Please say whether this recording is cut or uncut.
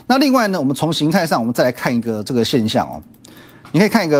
uncut